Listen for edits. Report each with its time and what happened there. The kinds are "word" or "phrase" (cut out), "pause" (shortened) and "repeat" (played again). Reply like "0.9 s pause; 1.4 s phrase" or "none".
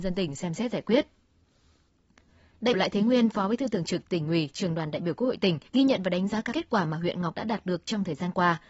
2.7 s word; 5.7 s pause; 6.5 s word; 7.3 s word